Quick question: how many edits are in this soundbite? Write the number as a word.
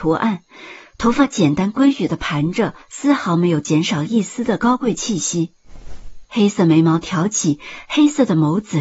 two